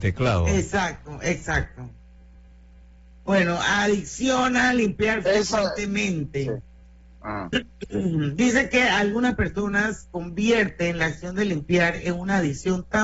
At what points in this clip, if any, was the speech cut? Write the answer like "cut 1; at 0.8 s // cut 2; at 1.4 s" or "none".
none